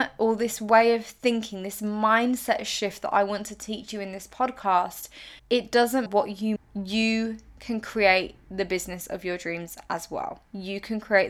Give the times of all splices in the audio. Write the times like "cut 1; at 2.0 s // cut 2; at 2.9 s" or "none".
cut 1; at 5.4 s // cut 2; at 6.1 s // cut 3; at 6.6 s